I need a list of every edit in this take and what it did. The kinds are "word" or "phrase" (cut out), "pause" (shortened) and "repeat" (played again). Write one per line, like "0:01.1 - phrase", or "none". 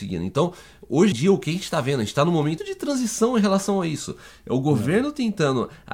0:01.1 - word
0:02.6 - word